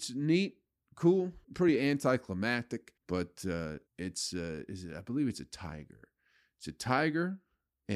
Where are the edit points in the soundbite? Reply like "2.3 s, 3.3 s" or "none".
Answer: 1.4 s, 3.0 s, 3.9 s